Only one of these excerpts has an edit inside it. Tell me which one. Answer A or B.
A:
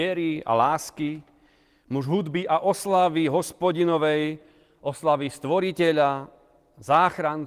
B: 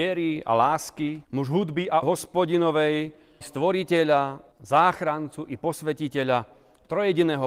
B